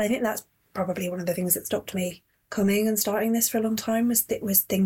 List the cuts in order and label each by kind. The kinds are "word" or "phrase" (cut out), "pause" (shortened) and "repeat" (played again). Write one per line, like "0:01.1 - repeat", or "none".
0:02.3 - pause